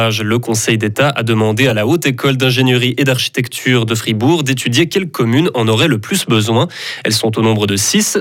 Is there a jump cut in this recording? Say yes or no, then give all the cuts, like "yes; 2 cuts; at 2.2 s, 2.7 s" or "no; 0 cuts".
no; 0 cuts